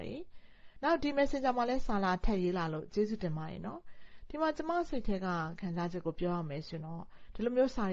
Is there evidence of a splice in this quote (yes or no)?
no